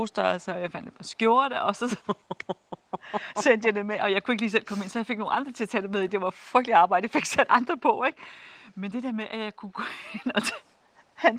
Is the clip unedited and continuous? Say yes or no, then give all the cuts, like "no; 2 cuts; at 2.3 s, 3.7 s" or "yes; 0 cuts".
yes; 0 cuts